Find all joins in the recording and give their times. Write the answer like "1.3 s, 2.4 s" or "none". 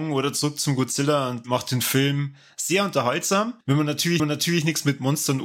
1.4 s, 3.6 s, 4.2 s